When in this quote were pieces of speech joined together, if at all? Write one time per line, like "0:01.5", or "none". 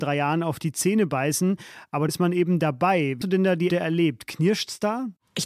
0:02.1
0:03.2
0:03.7